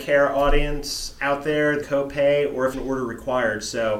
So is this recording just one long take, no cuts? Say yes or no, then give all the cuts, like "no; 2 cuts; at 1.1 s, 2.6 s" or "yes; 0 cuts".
no; 2 cuts; at 1.8 s, 2.7 s